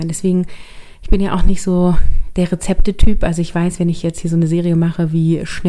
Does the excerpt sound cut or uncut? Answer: uncut